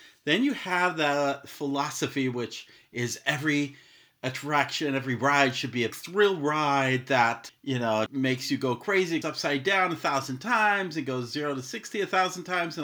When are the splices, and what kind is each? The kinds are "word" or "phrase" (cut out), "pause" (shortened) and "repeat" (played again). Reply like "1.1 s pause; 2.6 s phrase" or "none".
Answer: 5.9 s word; 7.5 s word; 8.1 s word; 9.2 s word